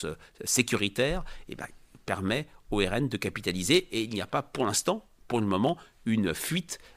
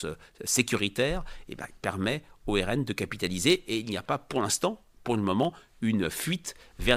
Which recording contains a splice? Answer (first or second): second